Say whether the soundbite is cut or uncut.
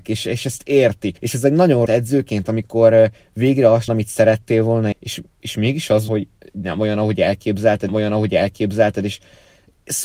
cut